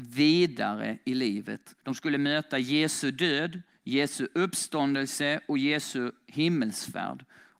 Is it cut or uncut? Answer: cut